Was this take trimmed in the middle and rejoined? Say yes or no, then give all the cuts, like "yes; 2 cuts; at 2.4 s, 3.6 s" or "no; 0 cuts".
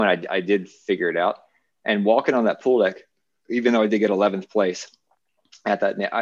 no; 0 cuts